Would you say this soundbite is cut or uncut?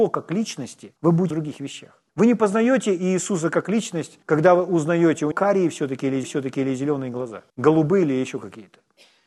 cut